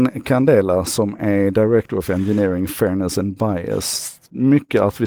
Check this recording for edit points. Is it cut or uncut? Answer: uncut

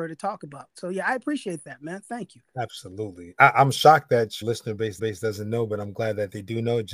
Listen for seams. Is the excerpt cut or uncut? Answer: cut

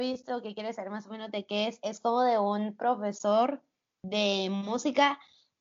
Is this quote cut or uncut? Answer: uncut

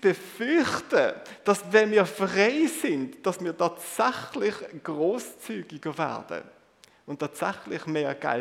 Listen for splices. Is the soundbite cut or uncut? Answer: uncut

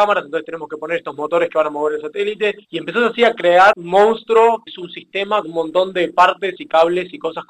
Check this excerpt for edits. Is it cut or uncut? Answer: cut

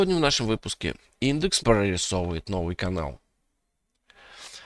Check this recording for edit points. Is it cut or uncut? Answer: cut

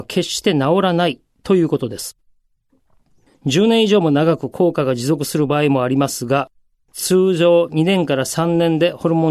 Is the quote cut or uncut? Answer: uncut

